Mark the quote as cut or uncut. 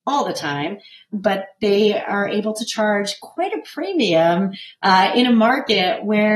uncut